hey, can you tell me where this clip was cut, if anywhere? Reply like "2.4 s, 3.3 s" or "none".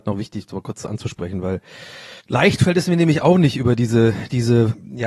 2.2 s

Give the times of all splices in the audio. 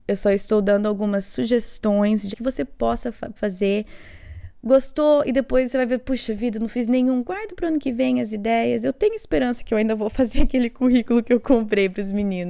2.3 s, 3.4 s

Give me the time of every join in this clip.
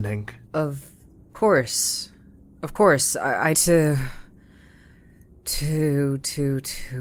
3.5 s

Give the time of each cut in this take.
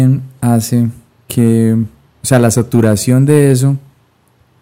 none

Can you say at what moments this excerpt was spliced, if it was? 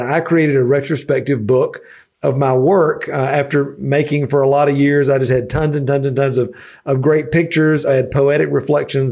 7.9 s

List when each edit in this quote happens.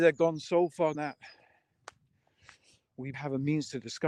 0.9 s, 3.1 s

